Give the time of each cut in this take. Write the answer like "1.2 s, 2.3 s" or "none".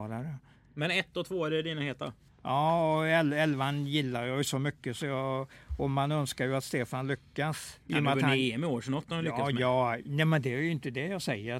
2.3 s, 7.8 s